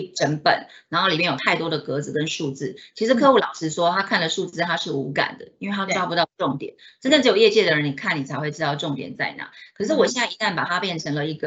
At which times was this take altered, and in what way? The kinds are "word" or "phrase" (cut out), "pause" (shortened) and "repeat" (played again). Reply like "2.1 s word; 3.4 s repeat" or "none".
none